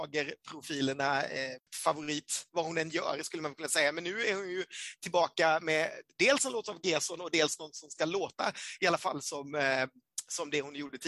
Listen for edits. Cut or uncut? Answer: uncut